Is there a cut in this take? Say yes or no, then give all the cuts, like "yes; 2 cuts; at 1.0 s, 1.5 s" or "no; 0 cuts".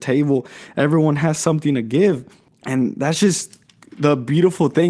no; 0 cuts